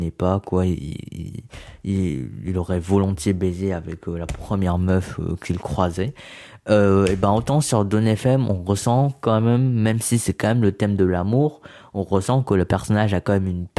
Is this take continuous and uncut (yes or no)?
yes